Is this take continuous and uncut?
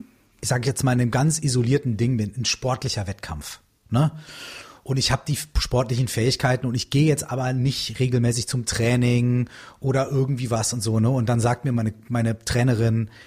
yes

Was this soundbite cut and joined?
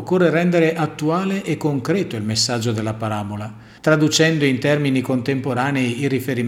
yes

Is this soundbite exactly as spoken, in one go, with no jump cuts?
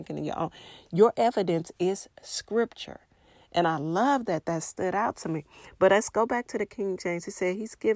yes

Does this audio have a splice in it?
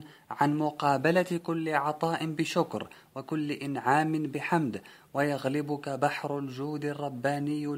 no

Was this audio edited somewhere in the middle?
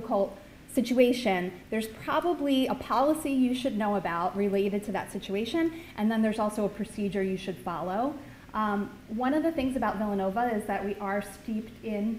no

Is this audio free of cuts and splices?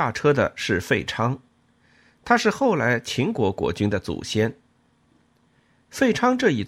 yes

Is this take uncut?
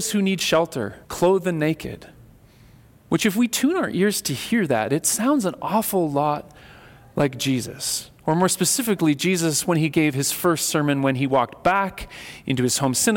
no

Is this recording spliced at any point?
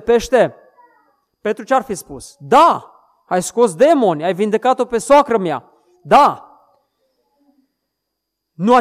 no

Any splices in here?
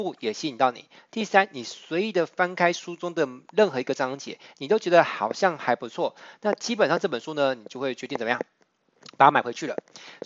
no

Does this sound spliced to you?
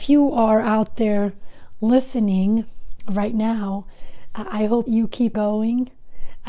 yes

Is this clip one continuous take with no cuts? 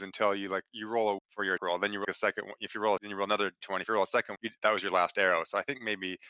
no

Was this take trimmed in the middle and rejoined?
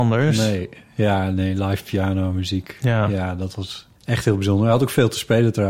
yes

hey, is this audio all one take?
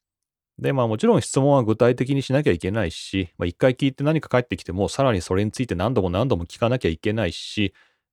yes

